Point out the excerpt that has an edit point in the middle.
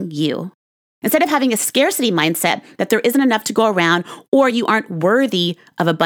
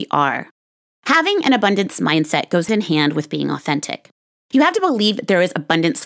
second; 1 cut; at 2.7 s

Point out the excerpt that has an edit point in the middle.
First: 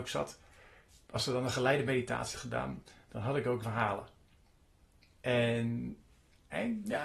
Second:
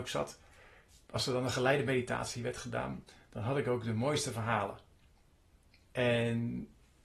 first; 2 cuts; at 2.3 s, 3.6 s

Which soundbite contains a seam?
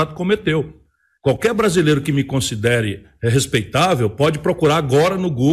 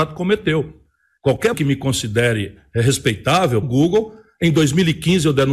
second; 2 cuts; at 1.5 s, 3.6 s

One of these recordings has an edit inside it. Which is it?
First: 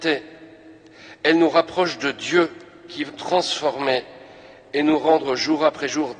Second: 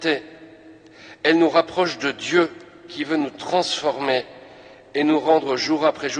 first; 1 cut; at 3.1 s

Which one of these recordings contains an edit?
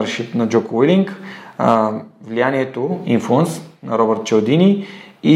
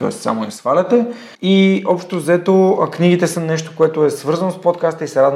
second; 1 cut; at 1.3 s

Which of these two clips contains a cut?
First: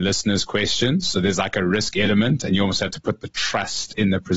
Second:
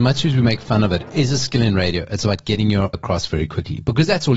second; 1 cut; at 2.9 s

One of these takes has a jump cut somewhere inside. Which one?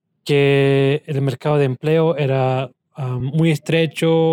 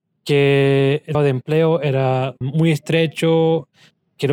second; 2 cuts; at 1.1 s, 2.4 s

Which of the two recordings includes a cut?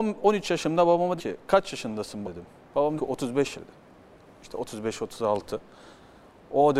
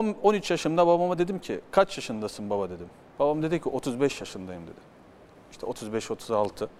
first; 4 cuts; at 1.2 s, 2.2 s, 3.0 s, 3.5 s

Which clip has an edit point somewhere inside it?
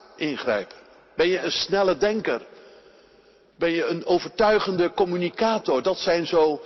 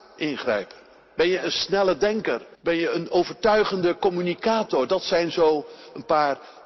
second; 1 cut; at 2.5 s

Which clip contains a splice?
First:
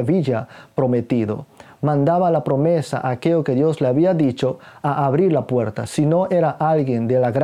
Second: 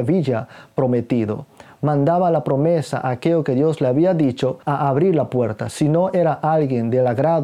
second; 1 cut; at 4.6 s

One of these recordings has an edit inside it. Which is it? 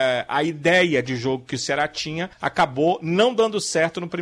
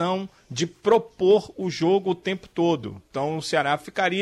first; 1 cut; at 2.3 s

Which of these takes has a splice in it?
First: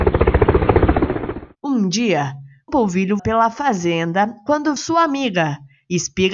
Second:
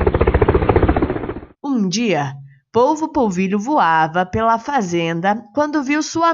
first; 3 cuts; at 2.7 s, 3.2 s, 4.8 s

